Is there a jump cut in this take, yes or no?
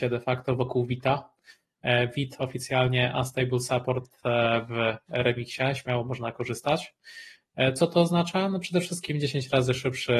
no